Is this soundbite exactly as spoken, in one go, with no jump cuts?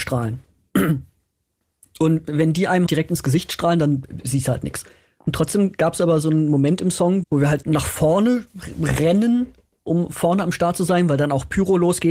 no; 3 cuts; at 2.9 s, 7.2 s, 7.6 s

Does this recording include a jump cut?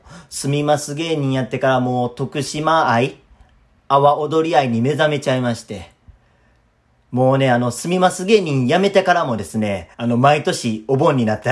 yes; 1 cut; at 9.9 s

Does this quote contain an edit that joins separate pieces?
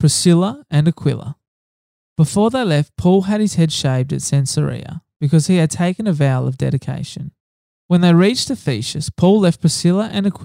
no; 0 cuts

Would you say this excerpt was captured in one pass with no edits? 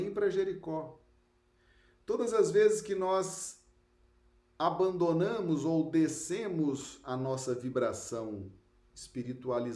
yes; 0 cuts

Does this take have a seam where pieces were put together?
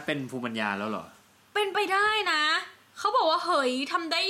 no; 0 cuts

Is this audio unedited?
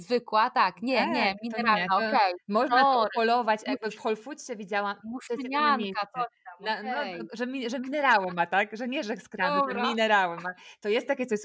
yes; 0 cuts

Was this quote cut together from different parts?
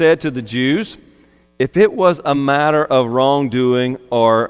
no; 0 cuts

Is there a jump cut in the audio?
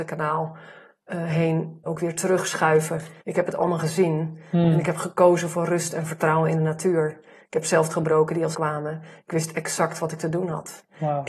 yes; 4 cuts; at 1.9 s, 3.2 s, 7.9 s, 8.5 s

